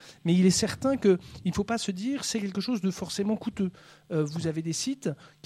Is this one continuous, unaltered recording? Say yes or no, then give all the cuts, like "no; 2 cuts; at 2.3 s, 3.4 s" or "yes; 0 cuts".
yes; 0 cuts